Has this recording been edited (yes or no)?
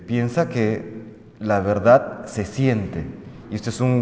no